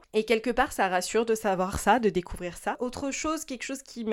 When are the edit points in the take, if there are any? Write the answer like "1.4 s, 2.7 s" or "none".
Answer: none